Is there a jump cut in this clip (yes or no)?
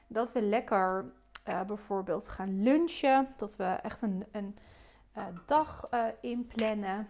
no